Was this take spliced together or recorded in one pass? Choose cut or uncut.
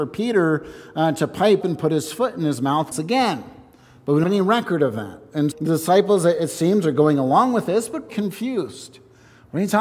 cut